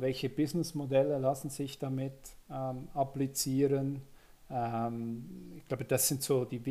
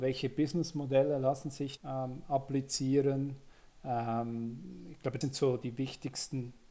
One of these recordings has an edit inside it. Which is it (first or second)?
second